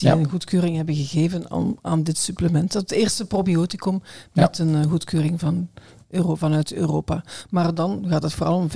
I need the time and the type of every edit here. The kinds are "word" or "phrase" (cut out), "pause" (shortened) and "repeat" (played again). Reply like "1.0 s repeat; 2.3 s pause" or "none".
none